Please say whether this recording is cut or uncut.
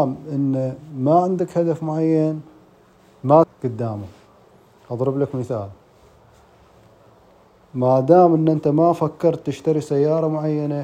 cut